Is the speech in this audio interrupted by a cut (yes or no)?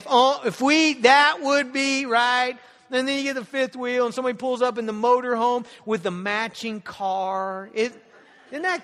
no